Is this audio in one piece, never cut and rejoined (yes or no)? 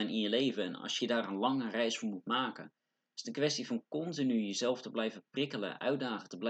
no